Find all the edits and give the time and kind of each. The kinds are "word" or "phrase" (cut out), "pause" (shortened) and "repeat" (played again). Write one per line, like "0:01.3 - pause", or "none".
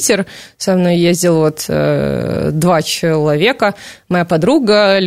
none